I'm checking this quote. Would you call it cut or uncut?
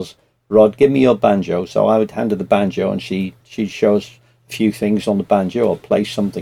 uncut